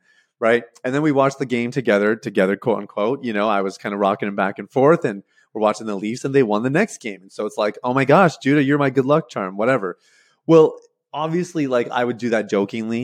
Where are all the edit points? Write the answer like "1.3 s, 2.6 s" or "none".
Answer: none